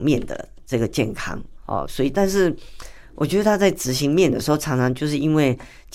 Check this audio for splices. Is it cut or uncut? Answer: uncut